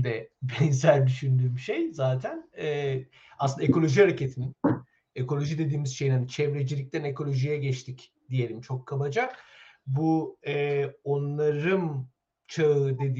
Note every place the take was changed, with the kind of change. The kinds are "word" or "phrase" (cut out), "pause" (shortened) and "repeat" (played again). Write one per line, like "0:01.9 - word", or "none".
none